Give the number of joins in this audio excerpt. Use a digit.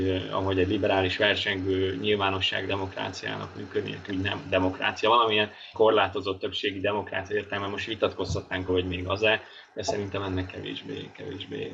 4